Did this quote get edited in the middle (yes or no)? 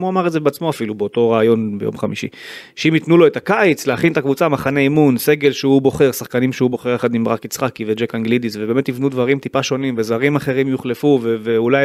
no